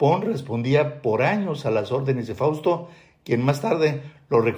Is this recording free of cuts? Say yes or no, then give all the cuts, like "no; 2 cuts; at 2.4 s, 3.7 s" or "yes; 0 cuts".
yes; 0 cuts